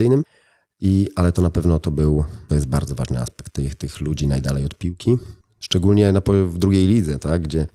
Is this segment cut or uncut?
uncut